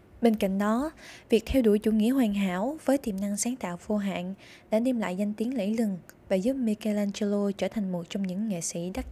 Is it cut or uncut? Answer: uncut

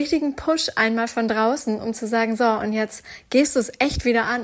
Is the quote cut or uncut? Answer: uncut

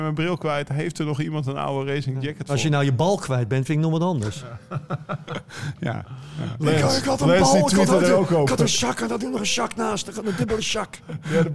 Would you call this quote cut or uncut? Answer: uncut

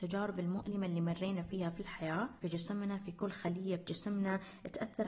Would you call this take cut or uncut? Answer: cut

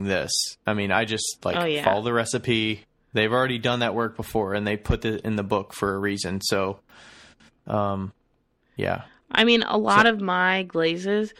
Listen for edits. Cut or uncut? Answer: uncut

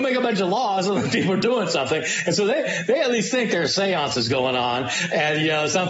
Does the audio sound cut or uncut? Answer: uncut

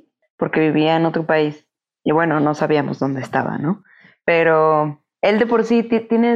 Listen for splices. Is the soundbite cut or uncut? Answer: uncut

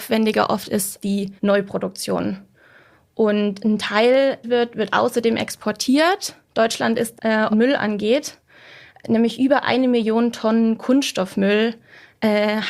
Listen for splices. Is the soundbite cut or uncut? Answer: cut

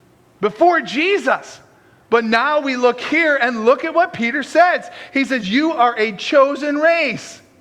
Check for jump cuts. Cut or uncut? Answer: uncut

